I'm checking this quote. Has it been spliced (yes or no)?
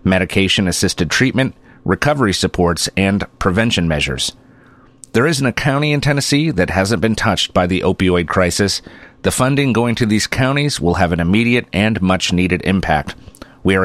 no